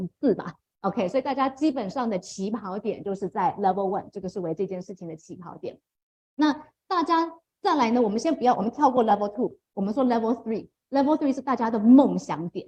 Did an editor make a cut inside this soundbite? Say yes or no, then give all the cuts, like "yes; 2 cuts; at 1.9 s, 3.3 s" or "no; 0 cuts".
no; 0 cuts